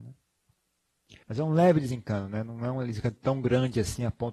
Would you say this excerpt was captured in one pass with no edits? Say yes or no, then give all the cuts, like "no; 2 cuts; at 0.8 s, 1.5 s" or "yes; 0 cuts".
no; 1 cut; at 1.2 s